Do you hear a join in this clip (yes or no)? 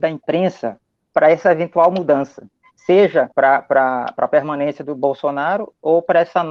yes